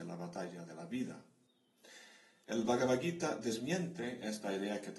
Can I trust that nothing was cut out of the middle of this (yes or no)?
yes